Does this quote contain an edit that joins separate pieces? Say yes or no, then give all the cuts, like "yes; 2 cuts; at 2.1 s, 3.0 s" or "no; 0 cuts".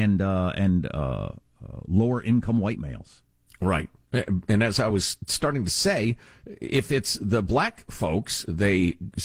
no; 0 cuts